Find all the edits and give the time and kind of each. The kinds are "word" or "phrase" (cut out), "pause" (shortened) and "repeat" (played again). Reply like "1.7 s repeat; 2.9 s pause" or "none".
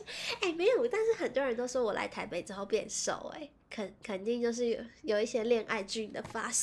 3.6 s pause